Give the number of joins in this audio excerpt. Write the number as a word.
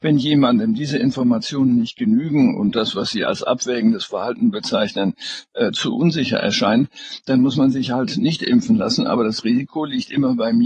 zero